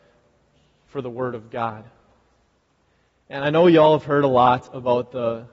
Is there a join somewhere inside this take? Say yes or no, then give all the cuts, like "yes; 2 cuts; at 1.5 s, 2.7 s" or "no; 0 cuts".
no; 0 cuts